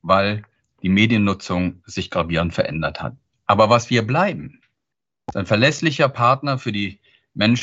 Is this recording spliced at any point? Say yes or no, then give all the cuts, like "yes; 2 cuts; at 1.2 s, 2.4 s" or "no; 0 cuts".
no; 0 cuts